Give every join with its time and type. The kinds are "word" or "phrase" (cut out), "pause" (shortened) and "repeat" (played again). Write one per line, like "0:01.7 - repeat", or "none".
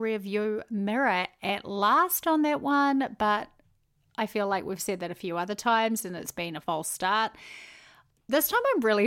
none